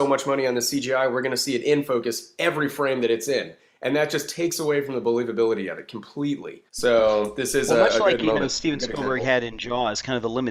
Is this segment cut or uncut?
cut